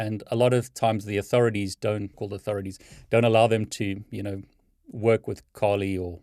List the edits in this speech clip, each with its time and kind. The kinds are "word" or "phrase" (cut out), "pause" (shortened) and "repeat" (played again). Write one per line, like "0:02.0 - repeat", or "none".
0:02.1 - word